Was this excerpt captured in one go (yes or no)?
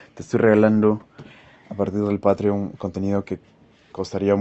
yes